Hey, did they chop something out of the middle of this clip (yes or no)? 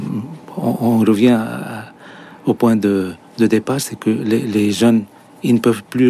no